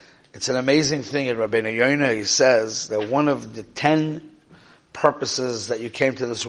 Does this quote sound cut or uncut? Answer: uncut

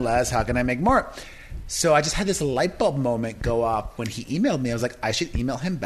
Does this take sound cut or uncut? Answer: uncut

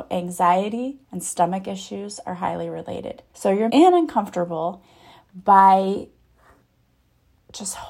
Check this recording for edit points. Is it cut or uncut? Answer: cut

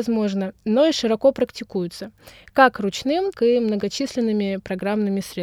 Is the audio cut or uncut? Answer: cut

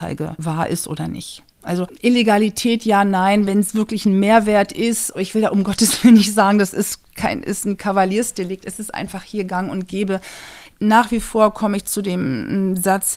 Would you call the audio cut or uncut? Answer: uncut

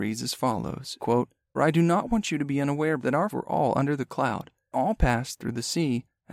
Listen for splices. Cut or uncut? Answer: cut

